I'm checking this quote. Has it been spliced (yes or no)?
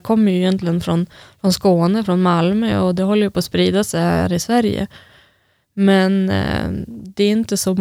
no